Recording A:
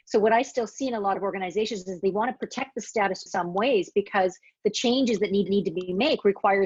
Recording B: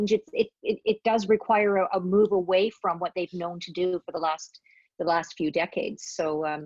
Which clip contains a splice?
A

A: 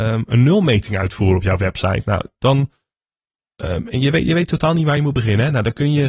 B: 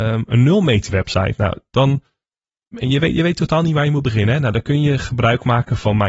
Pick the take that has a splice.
B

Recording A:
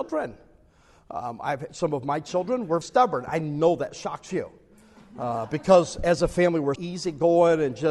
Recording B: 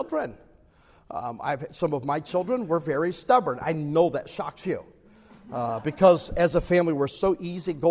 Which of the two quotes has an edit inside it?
A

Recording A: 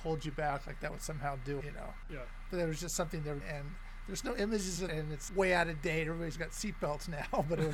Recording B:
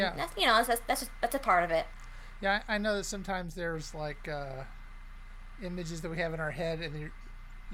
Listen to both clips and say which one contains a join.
A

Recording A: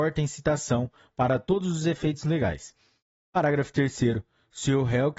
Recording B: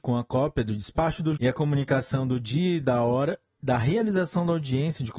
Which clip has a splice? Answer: B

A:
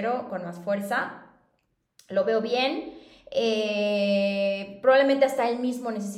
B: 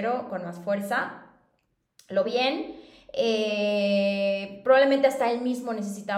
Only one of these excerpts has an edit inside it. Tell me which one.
B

